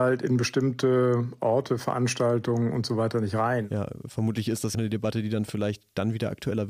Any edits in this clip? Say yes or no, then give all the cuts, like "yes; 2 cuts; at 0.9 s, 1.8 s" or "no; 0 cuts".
yes; 1 cut; at 4.7 s